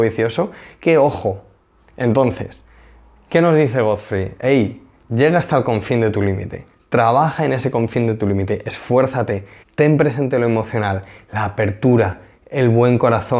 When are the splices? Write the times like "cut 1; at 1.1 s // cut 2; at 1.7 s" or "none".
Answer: cut 1; at 9.6 s